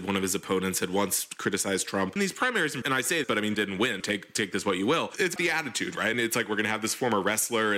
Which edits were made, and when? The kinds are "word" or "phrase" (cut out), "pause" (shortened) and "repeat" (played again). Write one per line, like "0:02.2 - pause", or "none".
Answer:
0:02.2 - word
0:02.8 - word
0:03.2 - word
0:03.5 - word
0:04.0 - word
0:05.4 - word
0:06.1 - word